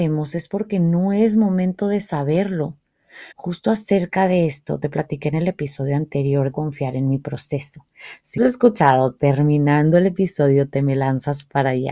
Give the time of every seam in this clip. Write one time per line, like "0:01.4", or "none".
0:03.3
0:06.5
0:08.4